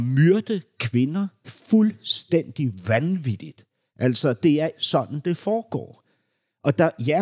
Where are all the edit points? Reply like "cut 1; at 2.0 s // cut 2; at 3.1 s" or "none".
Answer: cut 1; at 1.4 s // cut 2; at 4.7 s